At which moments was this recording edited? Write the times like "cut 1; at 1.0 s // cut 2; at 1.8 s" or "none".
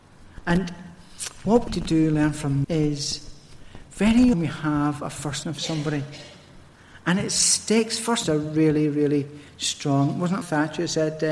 cut 1; at 1.7 s // cut 2; at 2.6 s // cut 3; at 4.3 s // cut 4; at 5.4 s // cut 5; at 8.2 s // cut 6; at 10.4 s